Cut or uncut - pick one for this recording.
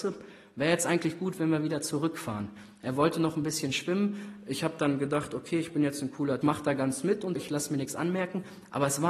cut